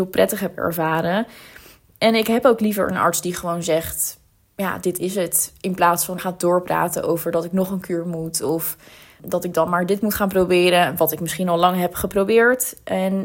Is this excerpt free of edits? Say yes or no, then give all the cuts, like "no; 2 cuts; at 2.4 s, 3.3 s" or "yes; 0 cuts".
no; 1 cut; at 6.2 s